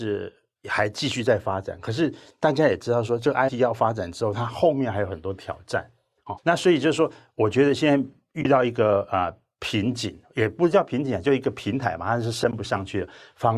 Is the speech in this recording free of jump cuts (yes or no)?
no